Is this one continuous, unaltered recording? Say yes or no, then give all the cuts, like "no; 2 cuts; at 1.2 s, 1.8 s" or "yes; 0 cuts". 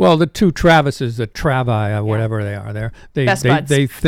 yes; 0 cuts